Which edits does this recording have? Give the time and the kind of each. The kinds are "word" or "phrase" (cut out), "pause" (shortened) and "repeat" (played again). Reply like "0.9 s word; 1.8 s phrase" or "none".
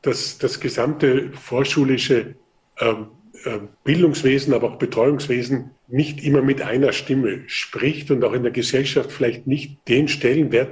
3.7 s pause; 5.8 s pause; 9.8 s pause